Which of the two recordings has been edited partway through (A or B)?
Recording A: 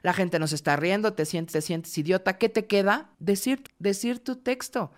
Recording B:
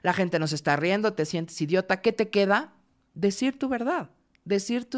A